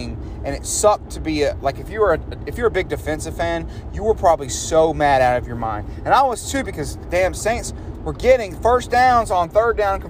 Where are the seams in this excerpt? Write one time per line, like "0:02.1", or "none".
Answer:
none